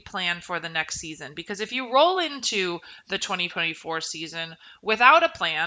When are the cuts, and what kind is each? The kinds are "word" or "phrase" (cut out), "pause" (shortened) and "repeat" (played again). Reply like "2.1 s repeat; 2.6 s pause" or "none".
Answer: none